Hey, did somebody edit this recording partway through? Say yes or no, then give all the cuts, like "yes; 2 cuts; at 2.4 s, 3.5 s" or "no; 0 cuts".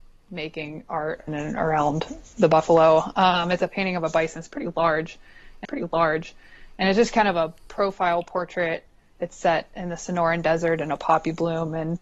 yes; 3 cuts; at 1.3 s, 3.6 s, 5.6 s